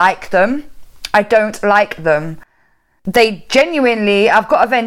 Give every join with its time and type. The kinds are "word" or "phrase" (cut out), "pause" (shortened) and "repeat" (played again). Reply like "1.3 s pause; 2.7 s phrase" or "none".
none

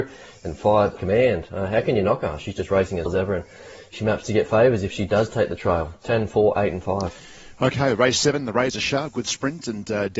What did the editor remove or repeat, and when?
1.0 s word; 3.1 s word

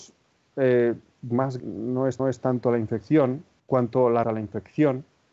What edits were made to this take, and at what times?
1.1 s word; 1.6 s word; 2.2 s repeat; 3.6 s pause; 4.2 s phrase

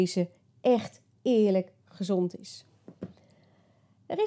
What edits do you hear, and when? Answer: none

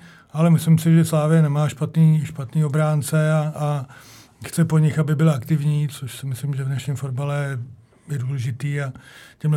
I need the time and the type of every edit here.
none

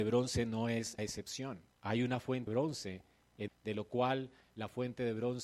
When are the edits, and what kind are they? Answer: 1.0 s word; 1.7 s pause; 2.5 s word; 3.5 s phrase

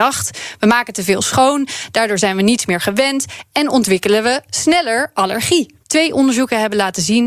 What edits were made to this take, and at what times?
5.8 s pause

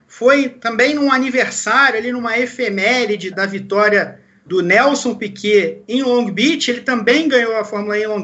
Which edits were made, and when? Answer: 3.3 s word; 4.5 s word

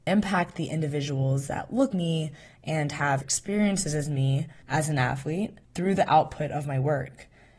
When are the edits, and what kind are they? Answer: 1.9 s word; 3.2 s word; 4.6 s pause; 5.6 s pause

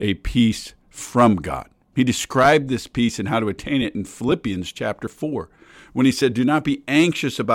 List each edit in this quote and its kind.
none

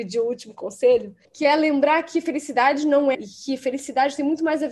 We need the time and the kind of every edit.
1.2 s pause; 3.1 s word

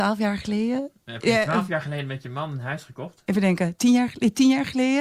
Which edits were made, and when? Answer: none

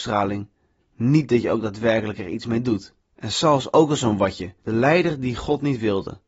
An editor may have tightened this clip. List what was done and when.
3.0 s pause; 4.6 s pause

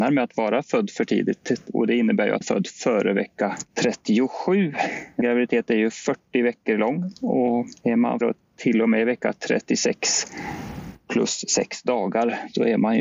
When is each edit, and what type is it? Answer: 2.4 s word; 5.2 s word; 8.2 s phrase

